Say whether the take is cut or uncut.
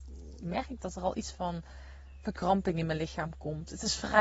uncut